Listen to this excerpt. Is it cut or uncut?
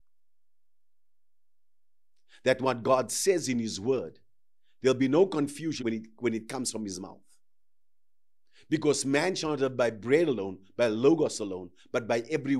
cut